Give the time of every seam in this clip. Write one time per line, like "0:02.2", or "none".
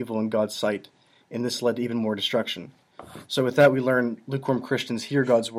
none

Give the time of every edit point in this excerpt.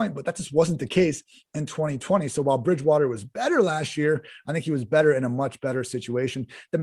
none

